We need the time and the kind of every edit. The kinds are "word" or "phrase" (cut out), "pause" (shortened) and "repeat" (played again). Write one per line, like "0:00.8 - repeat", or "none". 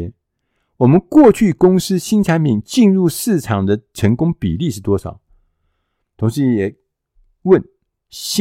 none